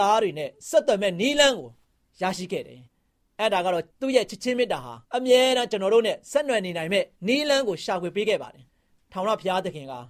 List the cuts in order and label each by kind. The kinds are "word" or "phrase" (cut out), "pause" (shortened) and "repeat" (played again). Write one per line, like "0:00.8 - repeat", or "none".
0:01.8 - pause
0:02.9 - pause
0:03.9 - pause
0:05.0 - pause
0:07.1 - pause
0:08.7 - pause